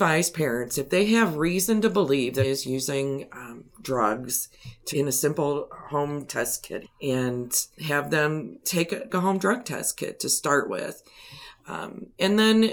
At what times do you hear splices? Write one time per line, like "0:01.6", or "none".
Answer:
0:02.4
0:04.9
0:06.3
0:06.8
0:07.8
0:08.6
0:09.1